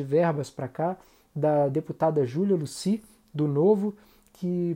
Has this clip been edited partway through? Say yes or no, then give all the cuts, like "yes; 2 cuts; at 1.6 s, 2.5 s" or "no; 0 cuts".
no; 0 cuts